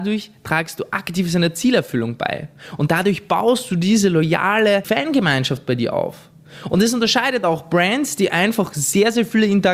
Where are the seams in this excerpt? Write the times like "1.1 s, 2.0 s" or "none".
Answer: none